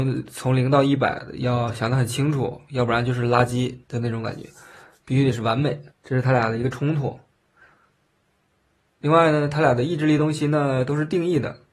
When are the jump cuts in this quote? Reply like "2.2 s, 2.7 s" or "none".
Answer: 3.8 s, 5.9 s